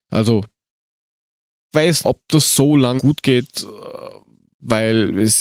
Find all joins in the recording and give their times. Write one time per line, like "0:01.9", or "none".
0:01.7
0:02.0
0:03.0